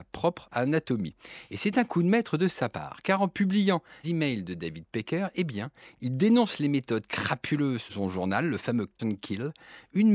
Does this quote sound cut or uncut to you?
cut